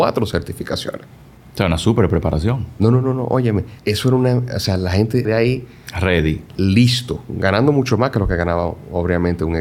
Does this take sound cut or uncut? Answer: cut